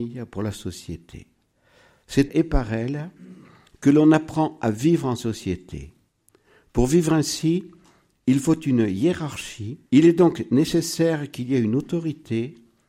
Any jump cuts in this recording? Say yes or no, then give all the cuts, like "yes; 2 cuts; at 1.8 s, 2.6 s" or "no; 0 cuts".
yes; 2 cuts; at 2.3 s, 9.9 s